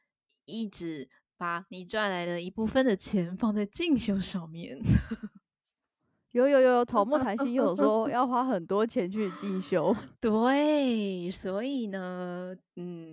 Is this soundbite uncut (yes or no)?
yes